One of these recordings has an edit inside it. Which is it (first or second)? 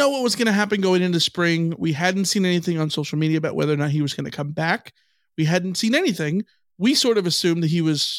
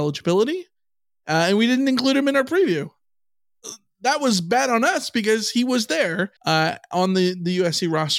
second